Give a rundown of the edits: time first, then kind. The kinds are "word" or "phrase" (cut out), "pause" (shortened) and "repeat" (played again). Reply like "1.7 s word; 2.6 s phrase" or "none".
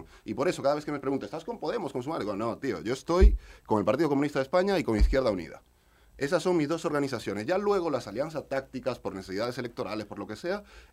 none